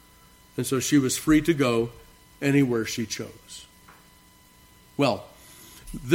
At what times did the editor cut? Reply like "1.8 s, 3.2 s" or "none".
none